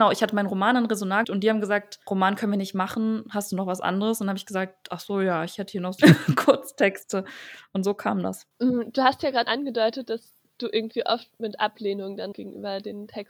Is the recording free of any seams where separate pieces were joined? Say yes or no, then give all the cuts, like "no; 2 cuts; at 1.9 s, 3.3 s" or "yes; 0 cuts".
no; 6 cuts; at 1.2 s, 2.0 s, 6.0 s, 8.5 s, 9.5 s, 12.3 s